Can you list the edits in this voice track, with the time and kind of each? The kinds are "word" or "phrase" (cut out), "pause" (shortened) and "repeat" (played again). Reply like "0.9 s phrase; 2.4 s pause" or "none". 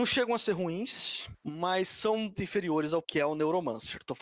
2.4 s word; 3.0 s word